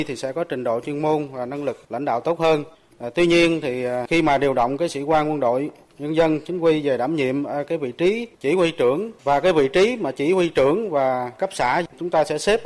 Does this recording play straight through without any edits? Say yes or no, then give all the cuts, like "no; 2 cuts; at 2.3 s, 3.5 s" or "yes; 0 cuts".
no; 1 cut; at 9.2 s